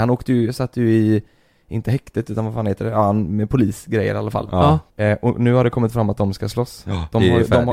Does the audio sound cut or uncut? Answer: cut